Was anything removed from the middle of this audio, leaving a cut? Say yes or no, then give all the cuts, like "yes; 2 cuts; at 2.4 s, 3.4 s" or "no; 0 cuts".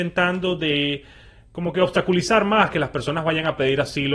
no; 0 cuts